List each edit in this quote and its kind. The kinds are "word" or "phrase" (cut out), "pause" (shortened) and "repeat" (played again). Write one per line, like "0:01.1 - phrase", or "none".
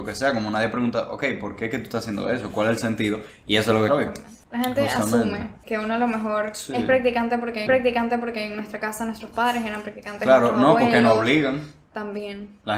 0:03.9 - phrase
0:04.4 - pause
0:05.6 - word
0:07.7 - repeat